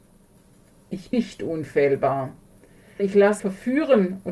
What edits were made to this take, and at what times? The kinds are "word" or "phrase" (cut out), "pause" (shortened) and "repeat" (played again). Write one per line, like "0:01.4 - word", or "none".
0:01.1 - word
0:03.0 - word
0:03.4 - word